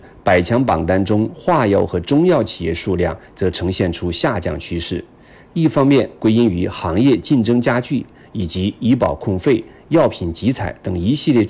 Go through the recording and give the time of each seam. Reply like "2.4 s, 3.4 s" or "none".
none